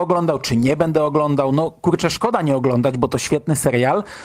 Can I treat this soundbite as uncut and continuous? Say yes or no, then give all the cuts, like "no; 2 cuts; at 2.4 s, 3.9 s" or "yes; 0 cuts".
yes; 0 cuts